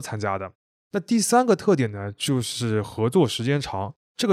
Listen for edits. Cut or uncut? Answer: uncut